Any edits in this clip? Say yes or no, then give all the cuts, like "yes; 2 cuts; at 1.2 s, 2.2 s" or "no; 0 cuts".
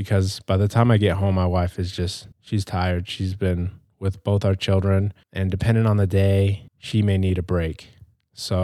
yes; 3 cuts; at 2.3 s, 5.2 s, 6.7 s